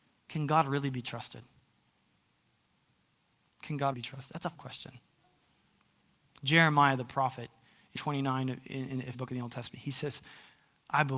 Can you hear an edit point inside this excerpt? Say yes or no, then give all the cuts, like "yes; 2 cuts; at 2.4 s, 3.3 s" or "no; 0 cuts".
yes; 4 cuts; at 3.9 s, 4.5 s, 8.0 s, 9.1 s